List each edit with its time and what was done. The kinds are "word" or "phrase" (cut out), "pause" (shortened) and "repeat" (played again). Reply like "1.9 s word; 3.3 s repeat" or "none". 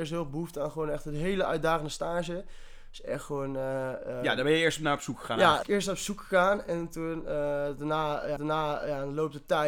5.6 s word; 8.4 s repeat

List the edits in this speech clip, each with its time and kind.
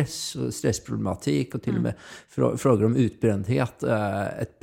none

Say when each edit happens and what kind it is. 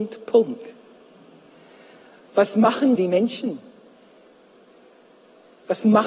3.0 s word

